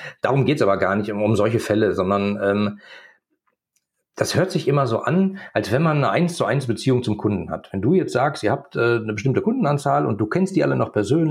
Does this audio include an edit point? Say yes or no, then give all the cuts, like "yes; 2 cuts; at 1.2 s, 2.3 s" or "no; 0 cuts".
no; 0 cuts